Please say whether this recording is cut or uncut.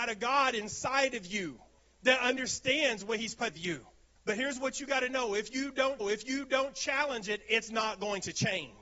cut